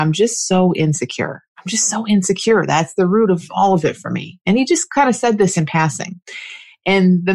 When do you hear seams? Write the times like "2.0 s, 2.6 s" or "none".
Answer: 1.5 s